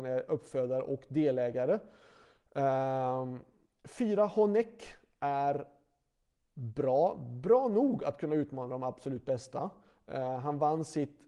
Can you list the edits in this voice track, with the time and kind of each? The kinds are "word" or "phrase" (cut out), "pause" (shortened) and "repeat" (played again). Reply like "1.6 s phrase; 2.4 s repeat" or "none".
none